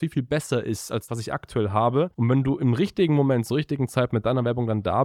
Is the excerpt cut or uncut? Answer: cut